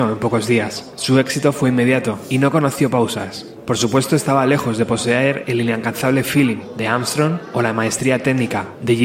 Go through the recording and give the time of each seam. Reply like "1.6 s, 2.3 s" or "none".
none